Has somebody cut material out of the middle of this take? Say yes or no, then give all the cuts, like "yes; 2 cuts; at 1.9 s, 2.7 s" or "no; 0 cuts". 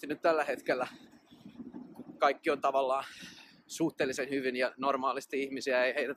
no; 0 cuts